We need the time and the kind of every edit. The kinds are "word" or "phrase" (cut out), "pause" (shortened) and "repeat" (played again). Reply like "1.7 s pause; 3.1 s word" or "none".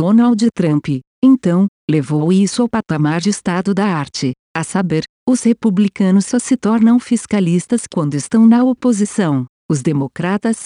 none